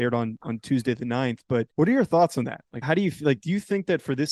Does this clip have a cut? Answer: yes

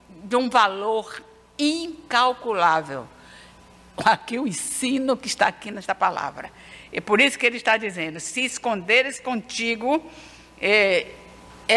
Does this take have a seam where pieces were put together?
no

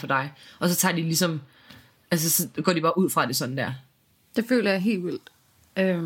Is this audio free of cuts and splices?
yes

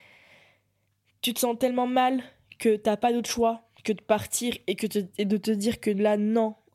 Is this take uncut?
yes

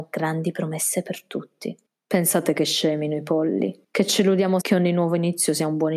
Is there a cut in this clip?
yes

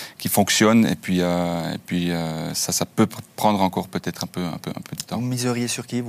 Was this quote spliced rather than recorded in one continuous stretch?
yes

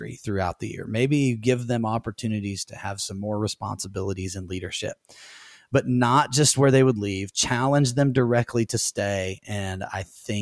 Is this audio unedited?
yes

